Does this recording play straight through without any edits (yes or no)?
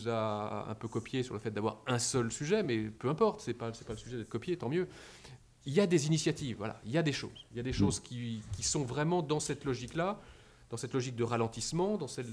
yes